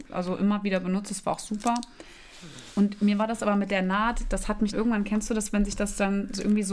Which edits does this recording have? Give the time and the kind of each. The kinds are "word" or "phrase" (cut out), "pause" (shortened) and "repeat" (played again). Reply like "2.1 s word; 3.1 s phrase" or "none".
4.7 s word